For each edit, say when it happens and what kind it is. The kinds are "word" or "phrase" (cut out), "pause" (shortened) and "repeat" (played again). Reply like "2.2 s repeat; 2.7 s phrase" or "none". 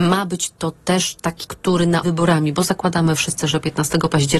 1.4 s word; 2.0 s phrase